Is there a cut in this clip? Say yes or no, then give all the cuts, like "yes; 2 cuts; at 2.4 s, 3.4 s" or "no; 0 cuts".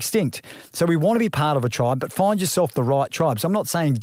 no; 0 cuts